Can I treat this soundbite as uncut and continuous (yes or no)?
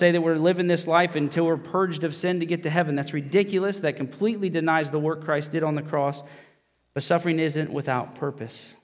yes